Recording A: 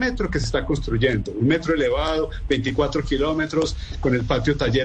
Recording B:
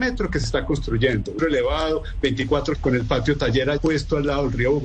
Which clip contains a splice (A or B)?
B